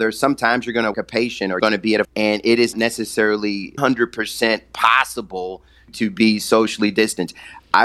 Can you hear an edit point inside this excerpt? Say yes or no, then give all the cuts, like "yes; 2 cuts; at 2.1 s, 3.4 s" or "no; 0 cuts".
yes; 6 cuts; at 0.9 s, 1.6 s, 2.0 s, 2.7 s, 3.8 s, 5.9 s